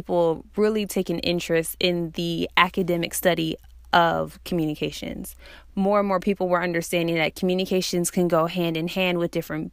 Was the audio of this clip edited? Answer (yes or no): no